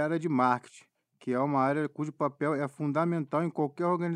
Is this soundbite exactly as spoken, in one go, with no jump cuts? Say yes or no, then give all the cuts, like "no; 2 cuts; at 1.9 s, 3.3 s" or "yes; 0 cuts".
yes; 0 cuts